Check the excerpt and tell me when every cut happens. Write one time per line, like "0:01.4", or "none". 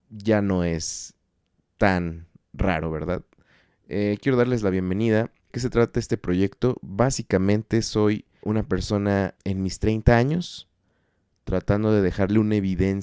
0:05.5
0:08.4
0:09.4